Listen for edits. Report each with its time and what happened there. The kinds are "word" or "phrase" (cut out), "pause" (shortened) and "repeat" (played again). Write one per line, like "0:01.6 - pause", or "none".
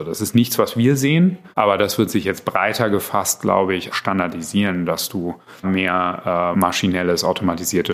0:01.5 - pause
0:03.9 - word
0:05.6 - word
0:06.5 - word